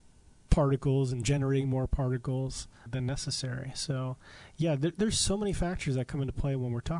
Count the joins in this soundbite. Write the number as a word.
one